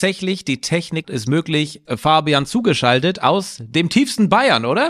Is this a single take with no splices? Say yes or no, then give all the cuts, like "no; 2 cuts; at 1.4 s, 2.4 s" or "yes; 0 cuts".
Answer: no; 2 cuts; at 1.0 s, 1.9 s